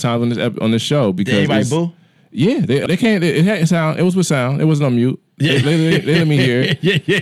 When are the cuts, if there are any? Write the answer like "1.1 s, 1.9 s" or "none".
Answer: 2.9 s